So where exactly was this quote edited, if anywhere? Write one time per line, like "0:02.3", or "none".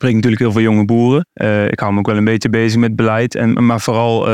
0:01.3